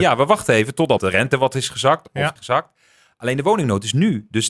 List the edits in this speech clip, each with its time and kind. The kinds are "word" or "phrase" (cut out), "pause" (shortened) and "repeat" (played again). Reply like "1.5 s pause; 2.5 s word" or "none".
1.0 s word; 2.4 s phrase